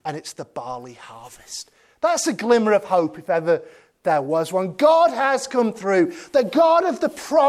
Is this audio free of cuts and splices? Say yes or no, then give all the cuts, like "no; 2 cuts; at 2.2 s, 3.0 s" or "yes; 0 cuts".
yes; 0 cuts